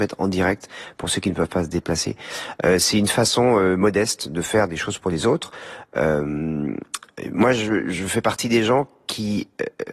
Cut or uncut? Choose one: uncut